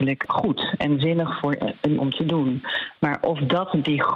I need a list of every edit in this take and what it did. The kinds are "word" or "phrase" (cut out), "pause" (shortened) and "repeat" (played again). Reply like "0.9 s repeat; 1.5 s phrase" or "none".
2.0 s word